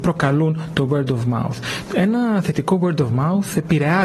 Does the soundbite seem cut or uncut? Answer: uncut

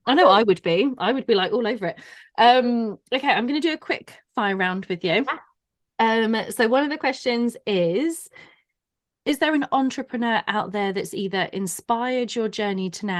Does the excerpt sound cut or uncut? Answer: uncut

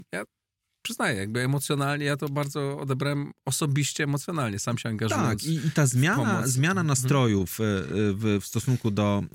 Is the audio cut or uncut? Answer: uncut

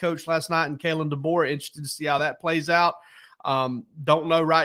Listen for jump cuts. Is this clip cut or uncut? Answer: uncut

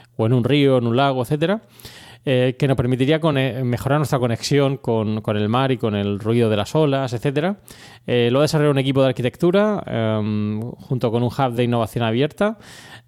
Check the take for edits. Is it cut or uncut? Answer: uncut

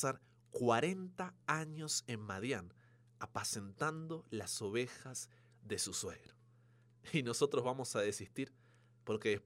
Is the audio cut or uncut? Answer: uncut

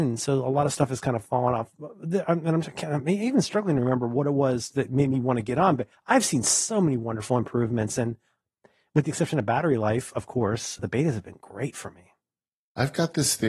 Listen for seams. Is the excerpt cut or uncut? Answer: cut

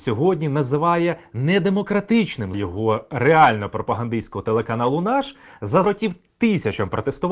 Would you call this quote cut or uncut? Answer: cut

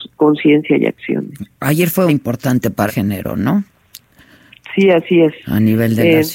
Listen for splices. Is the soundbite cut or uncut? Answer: cut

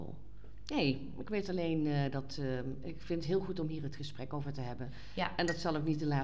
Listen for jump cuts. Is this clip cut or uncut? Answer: uncut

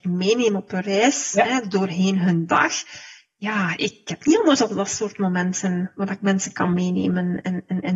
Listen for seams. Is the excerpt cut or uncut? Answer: uncut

